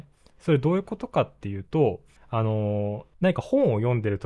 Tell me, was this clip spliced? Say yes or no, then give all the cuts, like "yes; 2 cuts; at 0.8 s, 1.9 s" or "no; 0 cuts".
yes; 2 cuts; at 2.2 s, 3.1 s